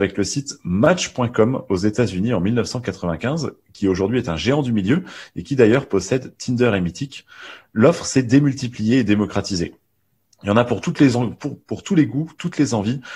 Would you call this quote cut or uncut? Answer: uncut